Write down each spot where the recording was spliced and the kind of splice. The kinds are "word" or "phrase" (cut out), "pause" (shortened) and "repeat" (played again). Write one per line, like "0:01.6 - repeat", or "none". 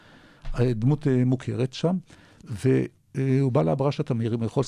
none